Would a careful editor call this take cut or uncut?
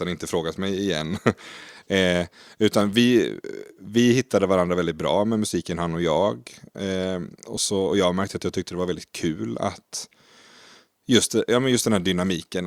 uncut